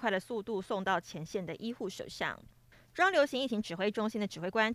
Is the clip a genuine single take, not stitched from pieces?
yes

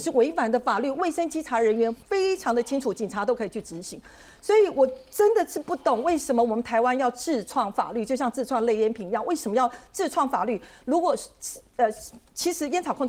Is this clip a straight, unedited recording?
no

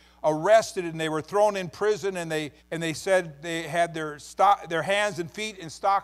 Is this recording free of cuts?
no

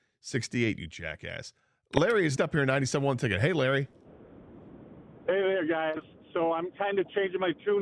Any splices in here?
yes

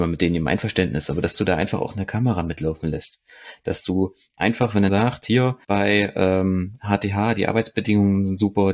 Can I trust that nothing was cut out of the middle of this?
no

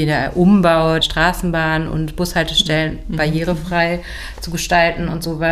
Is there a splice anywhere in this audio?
yes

